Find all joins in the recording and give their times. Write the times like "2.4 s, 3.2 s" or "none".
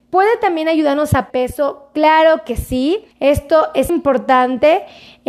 1.3 s, 3.1 s, 3.9 s